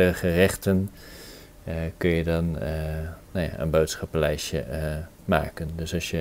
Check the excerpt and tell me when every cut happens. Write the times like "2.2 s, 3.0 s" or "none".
5.1 s